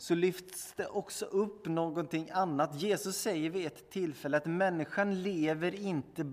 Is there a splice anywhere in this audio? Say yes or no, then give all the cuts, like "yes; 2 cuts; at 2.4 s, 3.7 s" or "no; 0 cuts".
no; 0 cuts